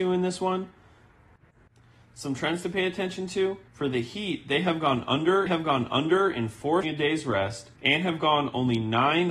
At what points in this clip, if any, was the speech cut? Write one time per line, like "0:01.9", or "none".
0:03.7
0:05.5
0:06.8
0:07.8